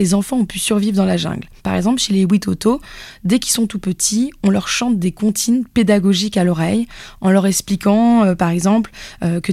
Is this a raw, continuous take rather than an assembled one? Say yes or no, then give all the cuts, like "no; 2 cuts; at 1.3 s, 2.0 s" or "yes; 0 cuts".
no; 1 cut; at 1.6 s